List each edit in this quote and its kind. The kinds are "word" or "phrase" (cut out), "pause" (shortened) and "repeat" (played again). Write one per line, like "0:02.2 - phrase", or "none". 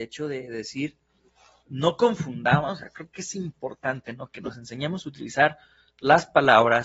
none